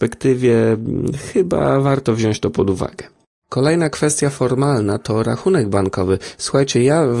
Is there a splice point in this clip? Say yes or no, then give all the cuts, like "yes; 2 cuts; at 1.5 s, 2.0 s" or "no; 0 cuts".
no; 0 cuts